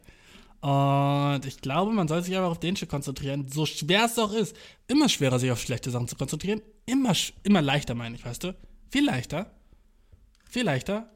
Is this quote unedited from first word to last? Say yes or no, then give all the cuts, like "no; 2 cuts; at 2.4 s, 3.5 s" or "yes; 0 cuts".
yes; 0 cuts